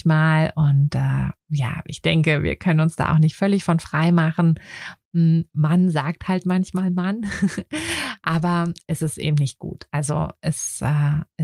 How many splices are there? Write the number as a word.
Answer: zero